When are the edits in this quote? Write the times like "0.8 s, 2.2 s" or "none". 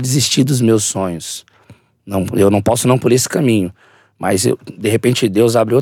3.0 s